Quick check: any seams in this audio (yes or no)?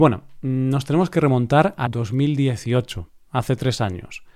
yes